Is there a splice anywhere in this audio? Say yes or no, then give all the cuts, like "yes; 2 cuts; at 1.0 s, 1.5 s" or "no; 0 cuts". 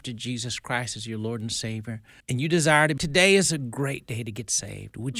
yes; 2 cuts; at 2.2 s, 3.0 s